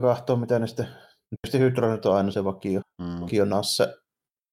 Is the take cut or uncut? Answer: cut